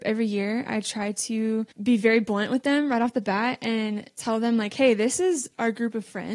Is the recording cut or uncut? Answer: cut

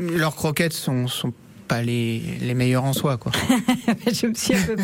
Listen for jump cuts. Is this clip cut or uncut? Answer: uncut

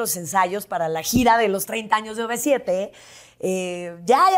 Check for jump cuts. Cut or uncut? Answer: uncut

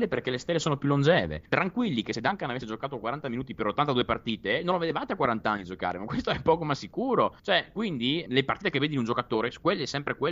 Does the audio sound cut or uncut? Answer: cut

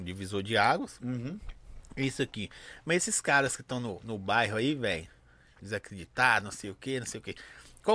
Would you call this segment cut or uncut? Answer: uncut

